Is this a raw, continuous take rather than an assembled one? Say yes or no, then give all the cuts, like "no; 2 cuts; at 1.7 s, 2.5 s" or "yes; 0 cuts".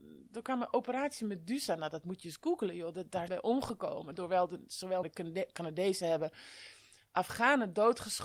no; 2 cuts; at 3.3 s, 5.0 s